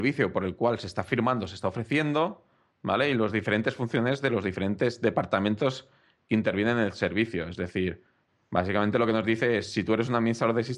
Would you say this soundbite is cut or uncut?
uncut